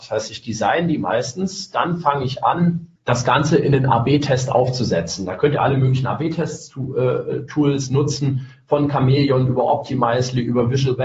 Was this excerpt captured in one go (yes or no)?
no